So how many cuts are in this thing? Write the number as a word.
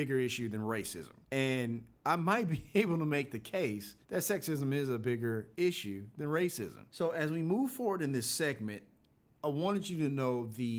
two